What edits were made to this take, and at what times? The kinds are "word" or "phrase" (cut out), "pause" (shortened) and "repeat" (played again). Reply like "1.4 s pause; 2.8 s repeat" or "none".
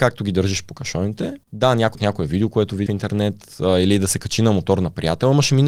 1.4 s pause; 1.9 s word; 2.9 s word